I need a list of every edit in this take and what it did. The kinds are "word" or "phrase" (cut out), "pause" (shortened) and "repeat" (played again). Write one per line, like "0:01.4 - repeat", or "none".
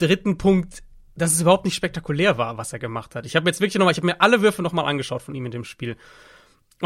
none